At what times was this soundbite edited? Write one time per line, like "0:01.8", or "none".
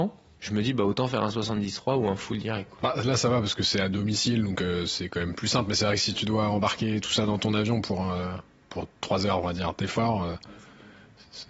none